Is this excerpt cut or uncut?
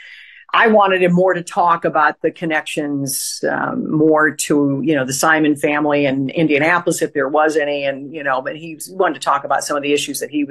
uncut